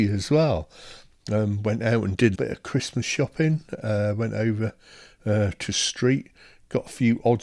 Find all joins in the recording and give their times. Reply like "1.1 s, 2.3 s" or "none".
2.3 s